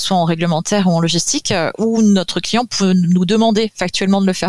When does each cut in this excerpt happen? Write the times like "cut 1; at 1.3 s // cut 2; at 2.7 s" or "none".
none